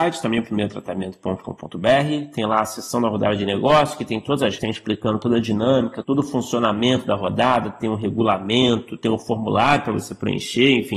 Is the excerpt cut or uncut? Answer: cut